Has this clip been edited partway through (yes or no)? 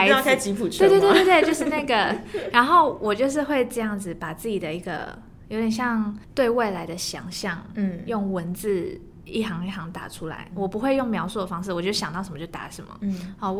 yes